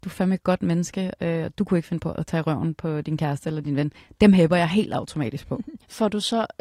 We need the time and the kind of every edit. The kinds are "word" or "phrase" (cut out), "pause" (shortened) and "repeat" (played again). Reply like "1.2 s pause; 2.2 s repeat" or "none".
none

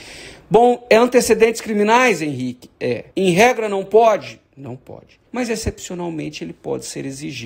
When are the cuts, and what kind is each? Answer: 3.1 s pause; 5.3 s pause

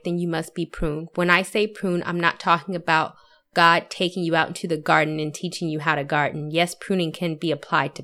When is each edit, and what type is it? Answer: none

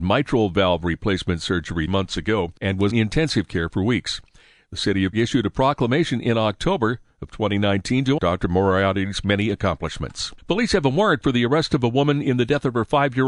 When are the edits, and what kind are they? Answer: 1.9 s word; 2.6 s pause; 2.9 s word; 5.1 s word; 8.2 s word; 10.4 s pause

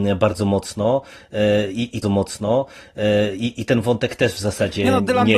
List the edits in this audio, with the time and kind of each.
2.0 s repeat

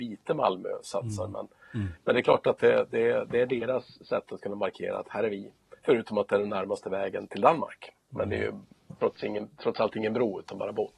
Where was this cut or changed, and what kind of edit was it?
7.3 s word

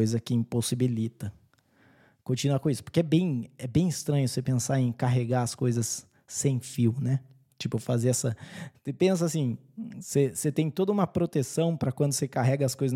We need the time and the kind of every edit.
none

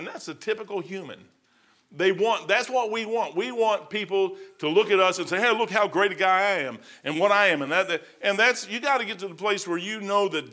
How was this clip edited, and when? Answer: none

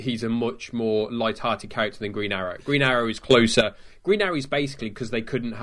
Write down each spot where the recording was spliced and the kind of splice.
none

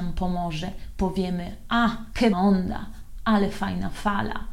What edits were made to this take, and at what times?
2.3 s word

